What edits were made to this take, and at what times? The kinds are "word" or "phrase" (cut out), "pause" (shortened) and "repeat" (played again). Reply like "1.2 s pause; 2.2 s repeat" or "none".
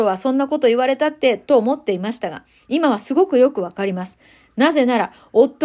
none